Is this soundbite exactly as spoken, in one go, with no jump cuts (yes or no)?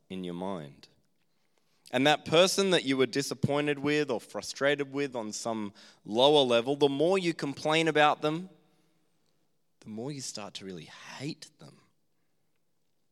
yes